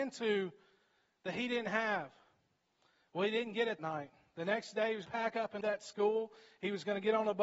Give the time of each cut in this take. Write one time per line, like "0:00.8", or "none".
0:03.8
0:05.1
0:05.6